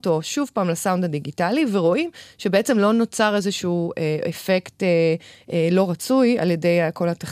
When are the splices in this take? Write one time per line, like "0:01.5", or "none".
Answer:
none